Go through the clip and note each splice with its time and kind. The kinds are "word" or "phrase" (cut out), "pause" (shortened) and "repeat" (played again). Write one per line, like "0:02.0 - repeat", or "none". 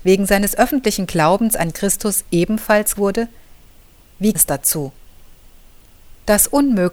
0:01.7 - word
0:02.9 - word
0:04.3 - word